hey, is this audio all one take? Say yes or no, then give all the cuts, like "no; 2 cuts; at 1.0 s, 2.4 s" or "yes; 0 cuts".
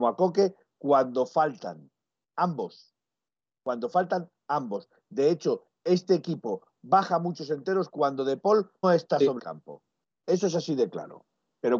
no; 2 cuts; at 8.8 s, 9.4 s